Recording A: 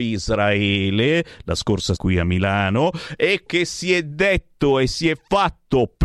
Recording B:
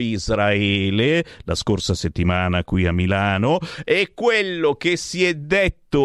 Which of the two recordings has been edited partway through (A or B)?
A